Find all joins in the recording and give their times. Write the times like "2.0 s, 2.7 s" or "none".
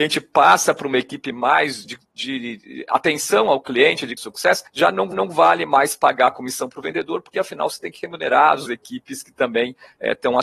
1.8 s, 4.2 s, 4.7 s, 5.1 s, 8.7 s